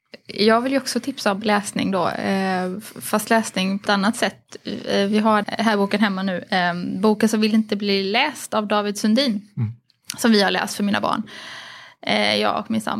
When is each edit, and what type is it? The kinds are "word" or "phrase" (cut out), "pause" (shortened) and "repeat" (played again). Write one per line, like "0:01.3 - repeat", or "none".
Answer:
0:03.9 - word
0:05.4 - word